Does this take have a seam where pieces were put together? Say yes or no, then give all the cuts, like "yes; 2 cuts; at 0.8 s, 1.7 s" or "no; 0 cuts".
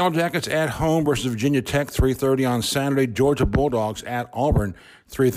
no; 0 cuts